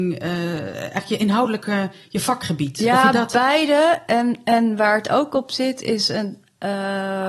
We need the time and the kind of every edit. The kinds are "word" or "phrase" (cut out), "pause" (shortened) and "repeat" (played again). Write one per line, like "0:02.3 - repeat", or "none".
none